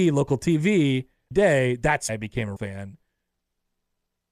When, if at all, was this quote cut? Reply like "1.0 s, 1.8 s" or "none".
1.3 s, 2.1 s, 2.6 s